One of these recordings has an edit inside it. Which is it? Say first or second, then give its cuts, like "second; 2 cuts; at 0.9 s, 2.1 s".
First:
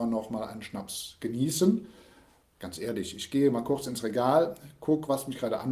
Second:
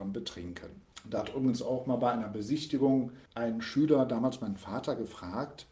second; 1 cut; at 3.3 s